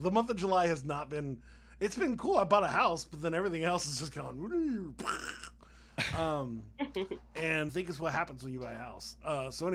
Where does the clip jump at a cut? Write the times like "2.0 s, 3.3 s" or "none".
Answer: 7.7 s